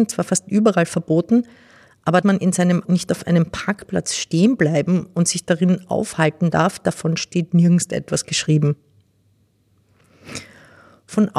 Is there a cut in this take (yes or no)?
yes